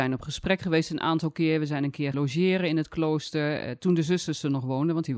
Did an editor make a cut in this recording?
yes; 1 cut; at 2.1 s

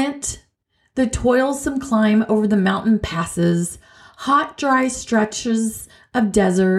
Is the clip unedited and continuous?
yes; 0 cuts

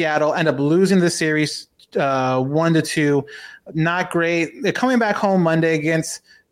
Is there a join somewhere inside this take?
no; 0 cuts

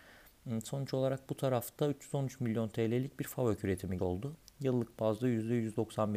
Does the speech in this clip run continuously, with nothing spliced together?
no; 1 cut; at 4.0 s

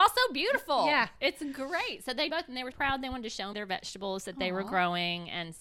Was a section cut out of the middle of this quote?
yes; 3 cuts; at 2.3 s, 2.7 s, 3.5 s

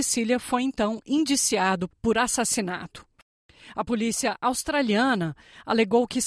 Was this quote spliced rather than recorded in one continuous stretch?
no; 0 cuts

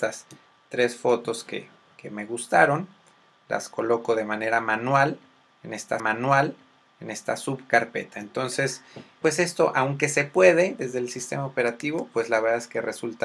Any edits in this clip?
yes; 2 cuts; at 6.0 s, 9.2 s

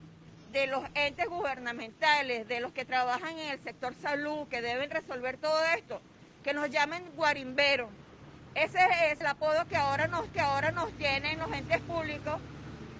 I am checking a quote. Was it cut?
yes; 2 cuts; at 9.2 s, 10.3 s

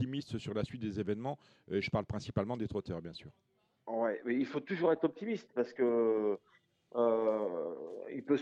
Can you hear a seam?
no; 0 cuts

